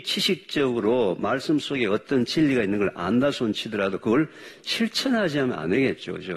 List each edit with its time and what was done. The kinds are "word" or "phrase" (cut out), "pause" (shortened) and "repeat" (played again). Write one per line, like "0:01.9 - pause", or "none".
none